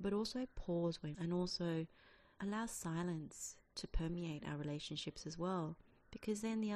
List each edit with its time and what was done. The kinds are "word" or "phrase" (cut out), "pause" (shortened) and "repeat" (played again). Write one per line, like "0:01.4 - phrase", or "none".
0:01.1 - phrase
0:02.4 - word
0:03.6 - pause